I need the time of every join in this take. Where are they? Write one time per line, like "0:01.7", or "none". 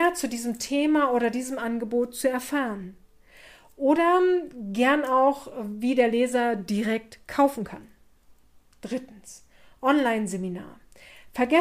none